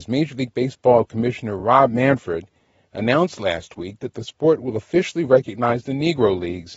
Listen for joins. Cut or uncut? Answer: uncut